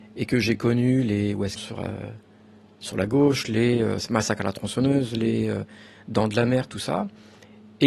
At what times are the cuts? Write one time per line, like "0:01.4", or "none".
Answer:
0:01.6